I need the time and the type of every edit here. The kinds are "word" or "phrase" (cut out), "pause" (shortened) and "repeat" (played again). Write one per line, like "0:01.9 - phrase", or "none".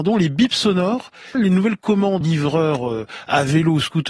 0:01.3 - word
0:02.2 - word